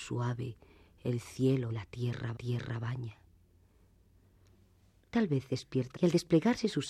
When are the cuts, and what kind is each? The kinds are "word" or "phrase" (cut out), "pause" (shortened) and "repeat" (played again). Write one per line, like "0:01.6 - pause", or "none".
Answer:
0:01.7 - word
0:02.3 - repeat
0:05.9 - word